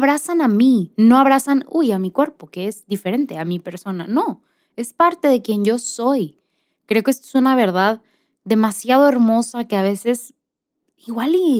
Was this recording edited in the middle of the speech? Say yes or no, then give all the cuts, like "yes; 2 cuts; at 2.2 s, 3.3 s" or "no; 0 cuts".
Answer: no; 0 cuts